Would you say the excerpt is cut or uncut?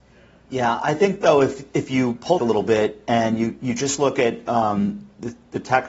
cut